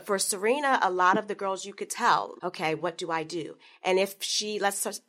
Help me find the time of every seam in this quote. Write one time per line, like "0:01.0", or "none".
0:02.4